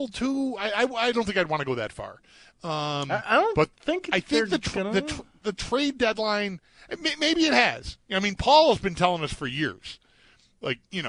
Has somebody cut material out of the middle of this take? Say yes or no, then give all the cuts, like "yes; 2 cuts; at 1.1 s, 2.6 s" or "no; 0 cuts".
no; 0 cuts